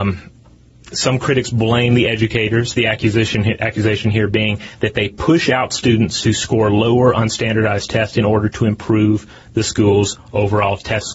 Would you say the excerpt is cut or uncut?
uncut